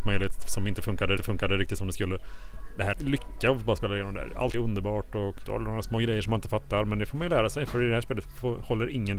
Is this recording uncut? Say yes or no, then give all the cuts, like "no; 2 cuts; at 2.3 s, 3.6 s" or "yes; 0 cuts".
no; 4 cuts; at 1.2 s, 2.9 s, 4.5 s, 5.5 s